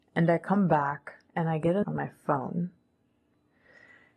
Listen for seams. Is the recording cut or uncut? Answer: cut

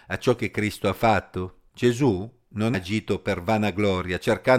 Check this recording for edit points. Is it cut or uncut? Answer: cut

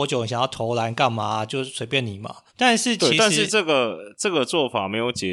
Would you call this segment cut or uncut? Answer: cut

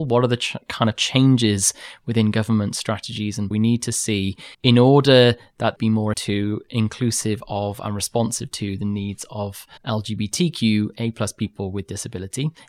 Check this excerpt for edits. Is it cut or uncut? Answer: cut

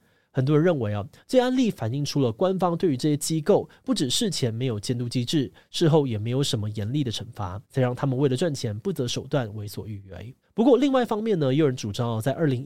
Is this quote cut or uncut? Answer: cut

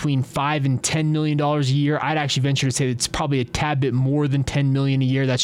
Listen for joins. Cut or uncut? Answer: uncut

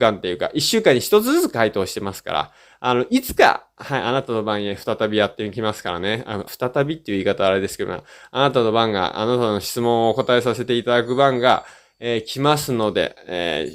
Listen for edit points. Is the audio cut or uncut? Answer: cut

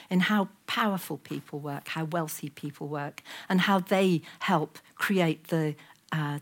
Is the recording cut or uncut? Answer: uncut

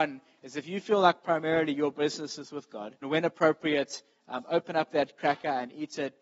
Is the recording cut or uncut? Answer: cut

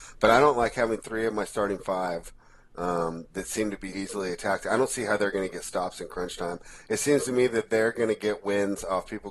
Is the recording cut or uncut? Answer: cut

